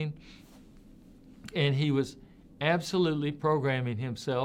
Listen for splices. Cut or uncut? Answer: uncut